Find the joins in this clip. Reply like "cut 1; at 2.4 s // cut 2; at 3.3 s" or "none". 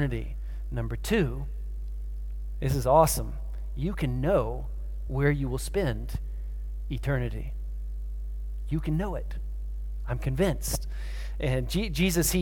none

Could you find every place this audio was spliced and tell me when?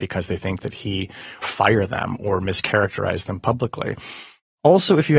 cut 1; at 1.4 s

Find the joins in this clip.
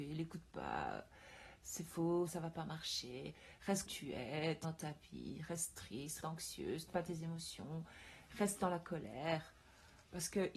cut 1; at 2.3 s // cut 2; at 3.9 s // cut 3; at 4.6 s // cut 4; at 6.2 s // cut 5; at 6.9 s

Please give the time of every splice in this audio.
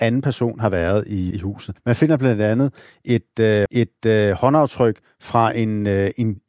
cut 1; at 1.3 s // cut 2; at 1.8 s // cut 3; at 3.7 s

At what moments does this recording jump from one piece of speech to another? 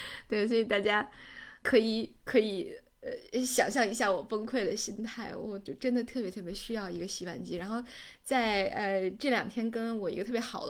cut 1; at 1.6 s

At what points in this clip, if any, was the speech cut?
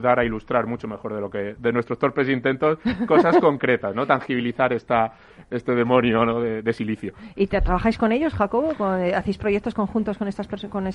none

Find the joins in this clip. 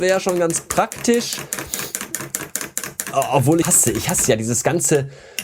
cut 1; at 3.6 s

